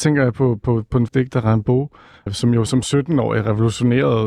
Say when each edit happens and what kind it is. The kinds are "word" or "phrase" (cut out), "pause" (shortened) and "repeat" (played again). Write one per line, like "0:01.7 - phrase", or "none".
0:01.1 - word
0:02.3 - word
0:02.7 - word